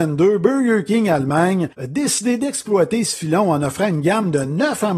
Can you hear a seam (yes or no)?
yes